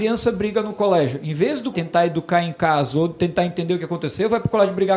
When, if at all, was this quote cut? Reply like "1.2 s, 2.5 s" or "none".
1.7 s

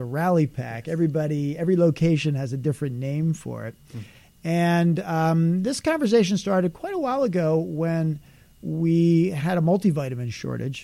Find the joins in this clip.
none

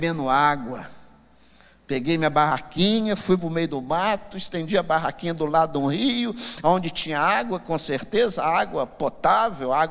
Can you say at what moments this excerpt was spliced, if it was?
none

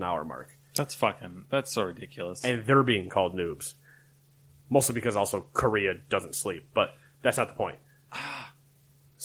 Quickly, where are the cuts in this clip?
none

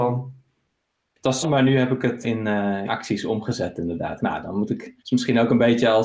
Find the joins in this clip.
1.4 s, 2.2 s, 2.9 s, 4.2 s, 5.0 s

